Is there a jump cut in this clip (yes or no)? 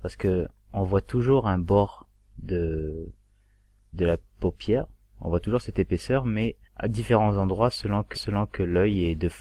yes